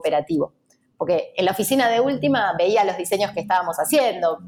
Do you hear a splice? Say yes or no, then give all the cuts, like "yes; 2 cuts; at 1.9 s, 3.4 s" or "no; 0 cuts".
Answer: no; 0 cuts